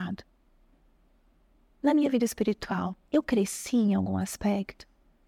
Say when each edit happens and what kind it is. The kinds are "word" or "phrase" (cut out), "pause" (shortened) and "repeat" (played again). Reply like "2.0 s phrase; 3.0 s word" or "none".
3.1 s pause